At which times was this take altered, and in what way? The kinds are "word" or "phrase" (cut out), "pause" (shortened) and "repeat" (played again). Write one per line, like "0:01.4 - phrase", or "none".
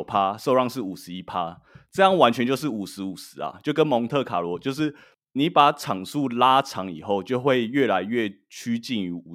none